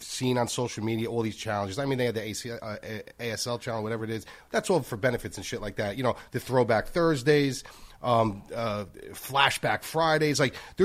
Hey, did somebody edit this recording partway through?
no; 0 cuts

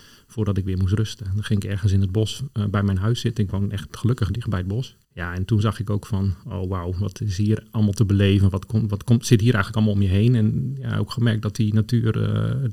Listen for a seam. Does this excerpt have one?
yes; 1 cut; at 5.0 s

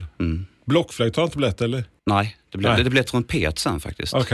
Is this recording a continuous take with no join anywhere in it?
yes; 0 cuts

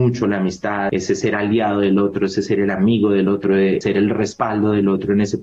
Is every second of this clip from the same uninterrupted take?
yes; 0 cuts

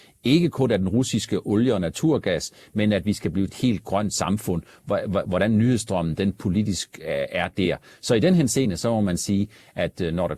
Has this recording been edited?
yes; 1 cut; at 3.5 s

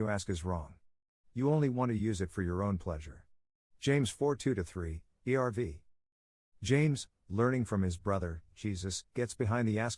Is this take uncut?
yes; 0 cuts

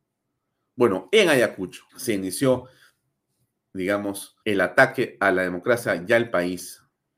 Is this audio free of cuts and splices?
no; 2 cuts; at 1.9 s, 4.4 s

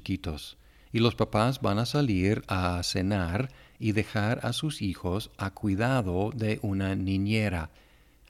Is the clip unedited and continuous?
yes; 0 cuts

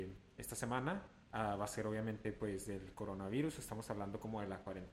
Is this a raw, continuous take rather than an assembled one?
no; 1 cut; at 1.2 s

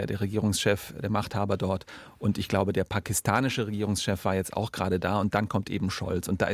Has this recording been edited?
no; 0 cuts

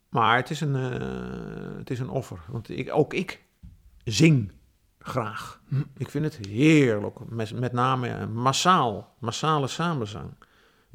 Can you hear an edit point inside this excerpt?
no; 0 cuts

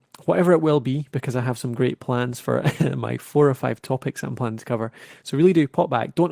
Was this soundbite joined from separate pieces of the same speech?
no; 0 cuts

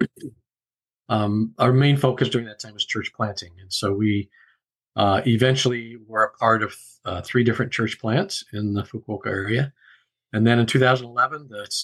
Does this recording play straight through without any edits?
yes; 0 cuts

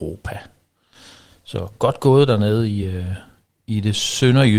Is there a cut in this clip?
no; 0 cuts

